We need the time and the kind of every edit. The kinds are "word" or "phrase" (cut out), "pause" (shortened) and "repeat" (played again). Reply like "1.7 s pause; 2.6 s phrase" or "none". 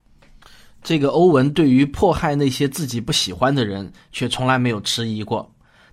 none